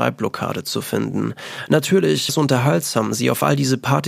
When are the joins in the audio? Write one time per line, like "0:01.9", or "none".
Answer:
0:02.3